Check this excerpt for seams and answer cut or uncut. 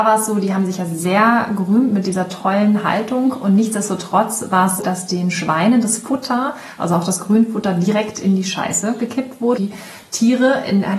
cut